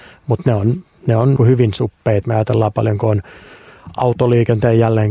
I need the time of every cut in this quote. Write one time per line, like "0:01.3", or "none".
0:01.4
0:02.2